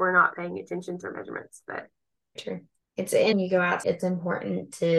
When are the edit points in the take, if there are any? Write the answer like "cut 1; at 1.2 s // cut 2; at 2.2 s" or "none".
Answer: cut 1; at 1.0 s // cut 2; at 2.4 s // cut 3; at 2.8 s // cut 4; at 3.3 s // cut 5; at 3.8 s